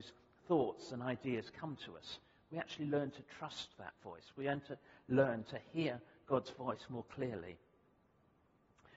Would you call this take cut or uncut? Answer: uncut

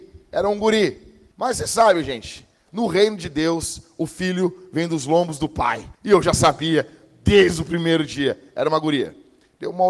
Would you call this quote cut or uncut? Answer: cut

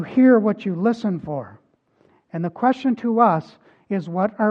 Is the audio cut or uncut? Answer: uncut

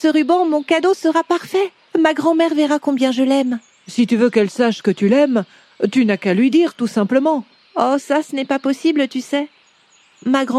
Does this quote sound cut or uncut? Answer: cut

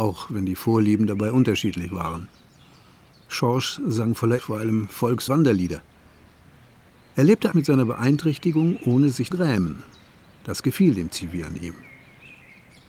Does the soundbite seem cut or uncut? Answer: cut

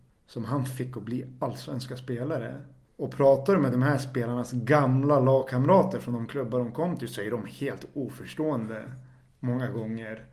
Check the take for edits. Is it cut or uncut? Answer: uncut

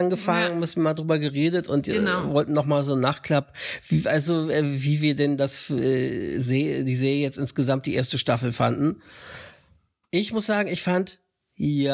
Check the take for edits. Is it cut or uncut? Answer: uncut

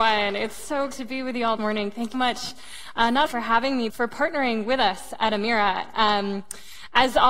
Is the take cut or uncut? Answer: cut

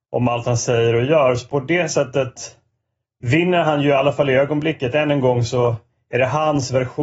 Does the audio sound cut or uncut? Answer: uncut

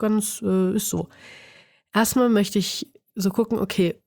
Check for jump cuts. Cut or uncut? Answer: uncut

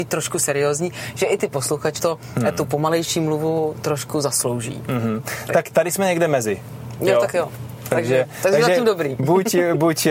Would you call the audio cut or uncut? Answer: cut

